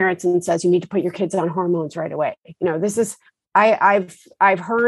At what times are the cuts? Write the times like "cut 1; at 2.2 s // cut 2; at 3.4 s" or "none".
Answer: cut 1; at 3.3 s